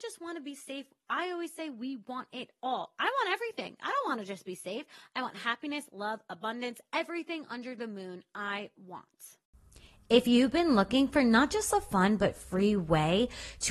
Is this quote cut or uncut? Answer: uncut